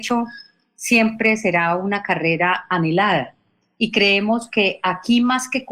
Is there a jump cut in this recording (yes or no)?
no